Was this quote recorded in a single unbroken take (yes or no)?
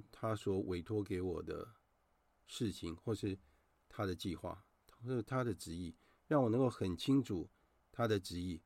yes